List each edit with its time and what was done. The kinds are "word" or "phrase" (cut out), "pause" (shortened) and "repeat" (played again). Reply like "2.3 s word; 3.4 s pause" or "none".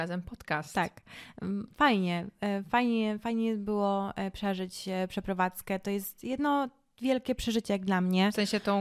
none